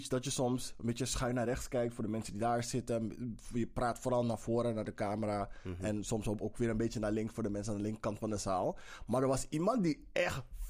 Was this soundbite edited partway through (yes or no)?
no